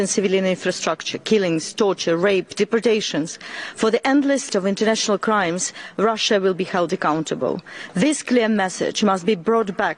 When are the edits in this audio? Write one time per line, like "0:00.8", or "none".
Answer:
0:04.5